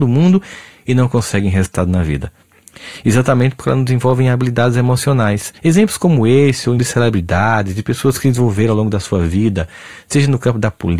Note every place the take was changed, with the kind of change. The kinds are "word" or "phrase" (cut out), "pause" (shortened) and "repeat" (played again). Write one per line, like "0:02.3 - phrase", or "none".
0:05.6 - pause
0:06.8 - word